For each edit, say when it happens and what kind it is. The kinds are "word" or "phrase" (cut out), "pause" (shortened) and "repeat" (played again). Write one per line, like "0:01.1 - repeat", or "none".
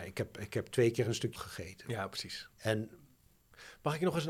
0:01.3 - word
0:02.5 - pause